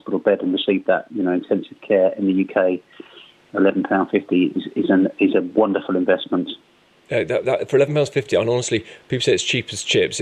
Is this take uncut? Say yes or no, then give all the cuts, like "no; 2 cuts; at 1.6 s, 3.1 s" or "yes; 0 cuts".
yes; 0 cuts